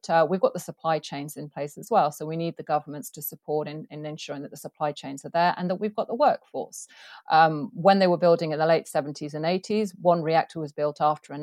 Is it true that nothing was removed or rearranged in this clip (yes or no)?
yes